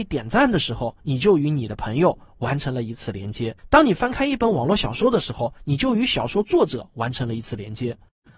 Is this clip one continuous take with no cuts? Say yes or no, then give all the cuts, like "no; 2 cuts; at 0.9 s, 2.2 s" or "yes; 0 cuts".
no; 1 cut; at 3.6 s